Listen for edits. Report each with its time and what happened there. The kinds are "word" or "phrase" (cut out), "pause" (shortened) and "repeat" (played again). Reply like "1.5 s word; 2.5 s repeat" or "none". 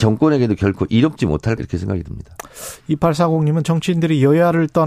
1.6 s word; 3.6 s phrase